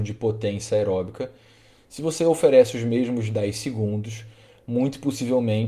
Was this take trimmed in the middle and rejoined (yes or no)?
no